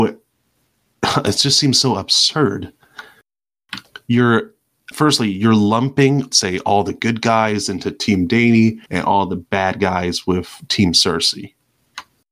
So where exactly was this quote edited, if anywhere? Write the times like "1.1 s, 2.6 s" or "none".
4.9 s, 6.3 s, 8.9 s